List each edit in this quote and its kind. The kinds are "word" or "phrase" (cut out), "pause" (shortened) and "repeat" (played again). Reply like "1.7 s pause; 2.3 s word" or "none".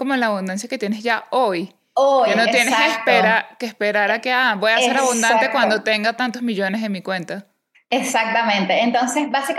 none